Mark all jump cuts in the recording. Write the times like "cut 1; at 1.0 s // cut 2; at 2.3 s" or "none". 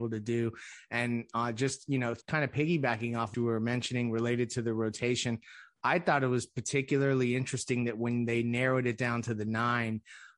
cut 1; at 2.2 s // cut 2; at 3.3 s